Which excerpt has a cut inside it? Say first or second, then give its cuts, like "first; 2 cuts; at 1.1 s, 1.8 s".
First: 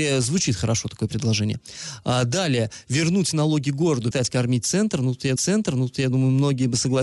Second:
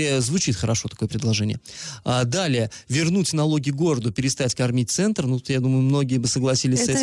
first; 2 cuts; at 4.1 s, 5.4 s